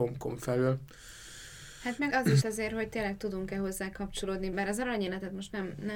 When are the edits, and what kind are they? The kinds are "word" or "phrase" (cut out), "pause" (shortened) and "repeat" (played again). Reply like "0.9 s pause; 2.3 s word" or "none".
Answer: 2.1 s word; 2.4 s word; 4.5 s word